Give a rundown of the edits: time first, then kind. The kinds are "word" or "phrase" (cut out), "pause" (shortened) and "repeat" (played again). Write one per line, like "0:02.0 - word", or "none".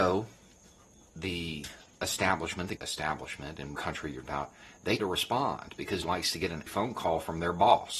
0:02.8 - word
0:03.8 - word
0:04.2 - word
0:05.0 - word
0:06.0 - word
0:06.7 - word